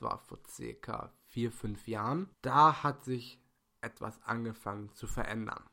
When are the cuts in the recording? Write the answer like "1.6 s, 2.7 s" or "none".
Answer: 2.3 s

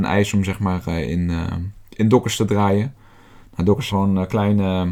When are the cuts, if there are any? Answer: 3.9 s

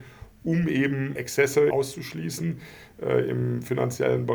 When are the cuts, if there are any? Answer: 1.1 s, 1.7 s

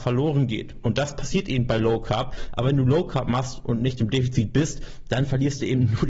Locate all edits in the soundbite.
none

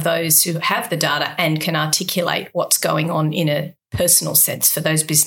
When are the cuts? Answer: none

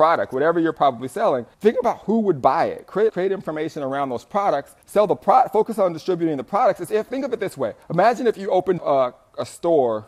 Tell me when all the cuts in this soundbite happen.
1.5 s, 3.1 s, 4.8 s, 7.1 s, 7.8 s, 8.8 s

